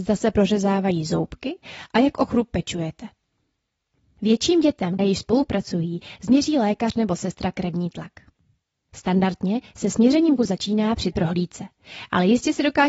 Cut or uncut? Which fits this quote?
cut